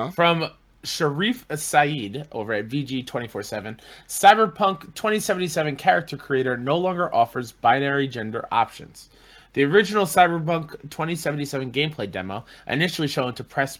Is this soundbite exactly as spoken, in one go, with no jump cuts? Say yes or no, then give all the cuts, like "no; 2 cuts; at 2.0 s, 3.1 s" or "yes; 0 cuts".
yes; 0 cuts